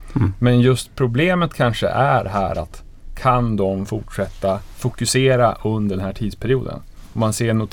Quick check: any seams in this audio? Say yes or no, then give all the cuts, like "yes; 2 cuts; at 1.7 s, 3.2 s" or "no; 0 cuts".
no; 0 cuts